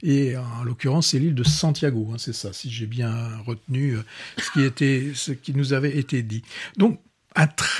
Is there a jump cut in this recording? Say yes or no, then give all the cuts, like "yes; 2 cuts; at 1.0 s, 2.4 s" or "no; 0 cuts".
no; 0 cuts